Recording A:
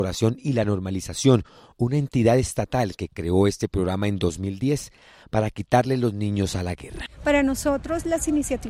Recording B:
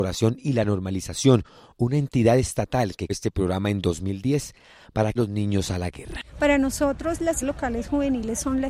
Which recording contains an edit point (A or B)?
B